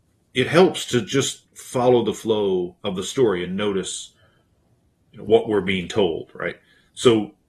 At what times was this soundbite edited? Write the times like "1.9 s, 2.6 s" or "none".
1.5 s, 2.8 s